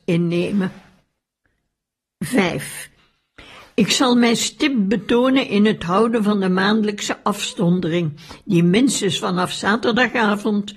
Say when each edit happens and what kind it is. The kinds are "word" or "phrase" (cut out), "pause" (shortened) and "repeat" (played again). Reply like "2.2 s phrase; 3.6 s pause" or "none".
none